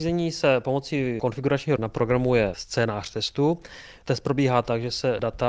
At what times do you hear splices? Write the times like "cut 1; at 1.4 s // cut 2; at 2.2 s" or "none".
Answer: cut 1; at 1.8 s